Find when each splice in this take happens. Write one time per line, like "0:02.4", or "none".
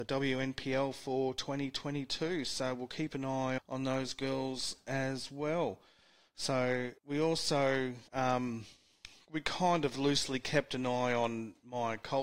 0:03.6
0:07.0
0:08.1